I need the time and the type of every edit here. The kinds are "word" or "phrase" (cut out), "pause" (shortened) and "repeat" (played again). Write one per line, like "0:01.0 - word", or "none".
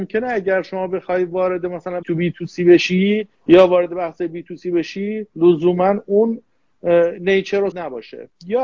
0:02.0 - phrase
0:03.3 - pause
0:07.7 - phrase